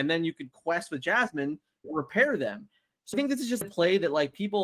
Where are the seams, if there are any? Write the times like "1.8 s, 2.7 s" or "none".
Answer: 1.8 s, 3.1 s, 3.6 s